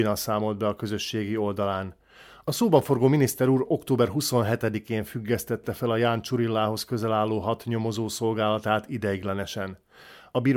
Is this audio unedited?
yes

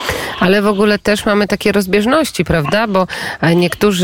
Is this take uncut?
yes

